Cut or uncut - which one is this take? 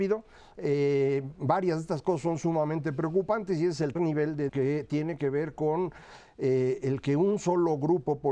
cut